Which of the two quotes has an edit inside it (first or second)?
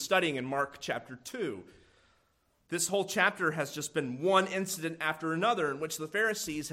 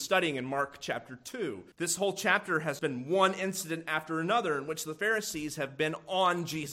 second